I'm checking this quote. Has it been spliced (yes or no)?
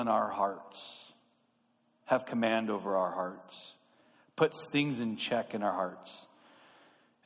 no